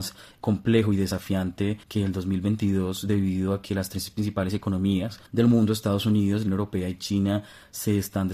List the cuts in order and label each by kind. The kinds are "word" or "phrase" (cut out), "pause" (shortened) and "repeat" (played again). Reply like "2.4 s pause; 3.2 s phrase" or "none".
1.8 s pause; 5.3 s pause; 6.5 s phrase